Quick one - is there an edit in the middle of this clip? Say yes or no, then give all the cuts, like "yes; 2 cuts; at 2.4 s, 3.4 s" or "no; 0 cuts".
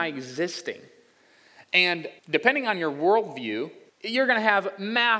yes; 2 cuts; at 2.2 s, 3.9 s